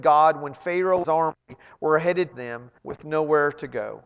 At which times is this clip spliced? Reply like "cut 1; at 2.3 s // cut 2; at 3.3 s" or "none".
cut 1; at 1.0 s // cut 2; at 2.3 s // cut 3; at 2.8 s